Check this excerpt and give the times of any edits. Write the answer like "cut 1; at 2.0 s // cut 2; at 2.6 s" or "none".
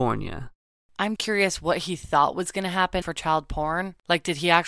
cut 1; at 1.2 s // cut 2; at 3.0 s

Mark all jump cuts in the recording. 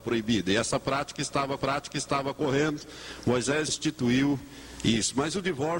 cut 1; at 1.6 s // cut 2; at 3.7 s

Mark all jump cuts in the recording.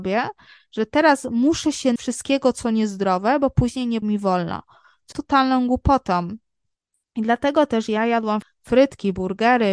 cut 1; at 2.0 s // cut 2; at 4.0 s // cut 3; at 5.1 s // cut 4; at 8.4 s

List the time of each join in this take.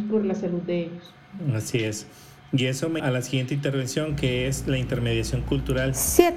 cut 1; at 3.0 s

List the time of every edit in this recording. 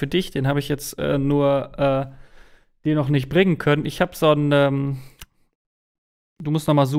none

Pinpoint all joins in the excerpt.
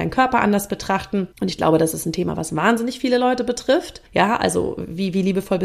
cut 1; at 1.3 s // cut 2; at 4.1 s

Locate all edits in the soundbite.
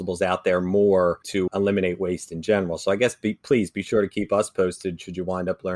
cut 1; at 1.5 s

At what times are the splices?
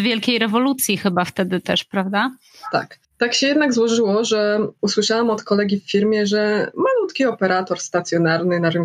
cut 1; at 3.0 s

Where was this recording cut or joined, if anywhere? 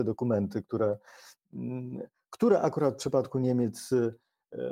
none

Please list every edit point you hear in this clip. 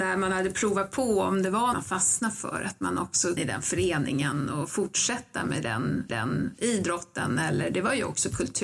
cut 1; at 1.7 s // cut 2; at 3.4 s // cut 3; at 6.1 s

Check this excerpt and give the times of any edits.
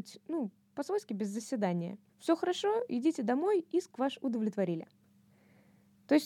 cut 1; at 2.1 s

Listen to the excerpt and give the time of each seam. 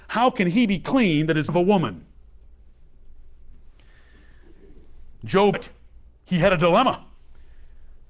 cut 1; at 1.5 s // cut 2; at 5.5 s

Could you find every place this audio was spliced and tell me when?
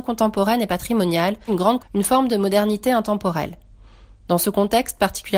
cut 1; at 1.5 s // cut 2; at 1.8 s

